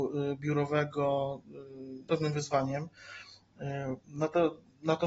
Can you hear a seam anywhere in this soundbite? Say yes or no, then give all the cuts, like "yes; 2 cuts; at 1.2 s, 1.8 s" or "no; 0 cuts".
yes; 1 cut; at 2.1 s